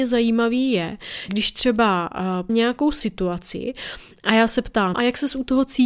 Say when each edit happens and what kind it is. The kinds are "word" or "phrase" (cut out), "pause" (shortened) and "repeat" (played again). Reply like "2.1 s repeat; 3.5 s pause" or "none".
1.3 s word; 2.5 s word; 4.9 s word